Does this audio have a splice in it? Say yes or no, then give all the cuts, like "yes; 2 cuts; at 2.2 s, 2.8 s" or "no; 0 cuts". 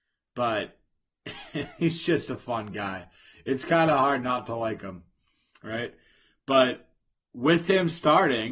no; 0 cuts